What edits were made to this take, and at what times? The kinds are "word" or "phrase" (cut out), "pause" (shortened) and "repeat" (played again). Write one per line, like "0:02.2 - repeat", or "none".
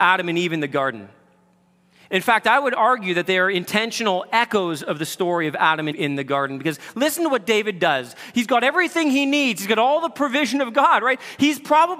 0:05.9 - word

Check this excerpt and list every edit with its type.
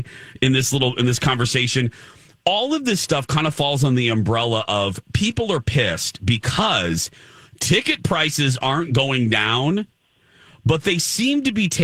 none

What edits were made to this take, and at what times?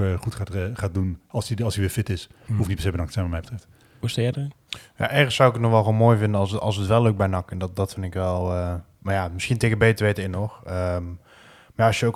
none

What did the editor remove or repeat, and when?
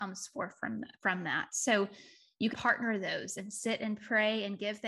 0:02.5 - word

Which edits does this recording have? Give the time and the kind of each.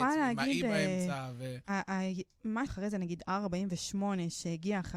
0:01.6 - pause
0:02.7 - word

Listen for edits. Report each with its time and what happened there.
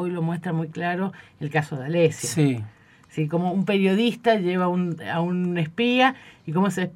none

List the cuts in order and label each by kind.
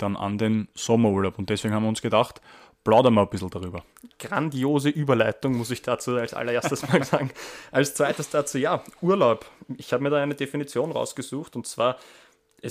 none

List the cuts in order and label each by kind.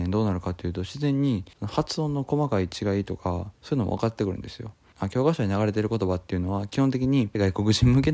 0:01.5 - pause
0:03.5 - pause

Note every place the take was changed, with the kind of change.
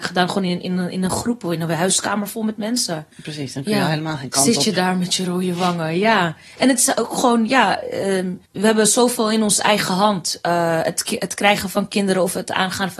0:03.1 - pause
0:08.5 - pause

